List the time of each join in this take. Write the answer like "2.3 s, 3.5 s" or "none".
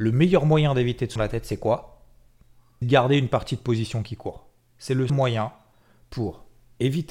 1.2 s, 2.8 s, 5.1 s